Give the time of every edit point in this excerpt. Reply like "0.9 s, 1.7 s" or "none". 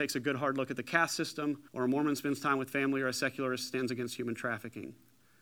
1.7 s